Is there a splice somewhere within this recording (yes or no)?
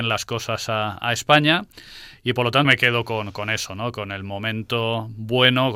yes